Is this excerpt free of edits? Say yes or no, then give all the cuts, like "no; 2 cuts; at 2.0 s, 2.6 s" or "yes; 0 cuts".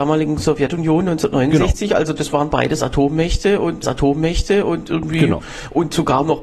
no; 2 cuts; at 2.5 s, 3.8 s